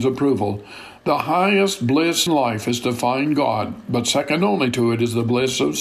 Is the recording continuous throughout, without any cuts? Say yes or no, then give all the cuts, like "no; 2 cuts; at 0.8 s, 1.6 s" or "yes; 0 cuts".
no; 1 cut; at 2.3 s